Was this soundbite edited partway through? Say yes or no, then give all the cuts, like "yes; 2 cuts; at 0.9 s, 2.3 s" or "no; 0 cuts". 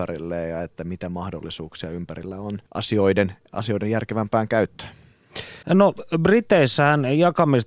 yes; 2 cuts; at 2.7 s, 5.6 s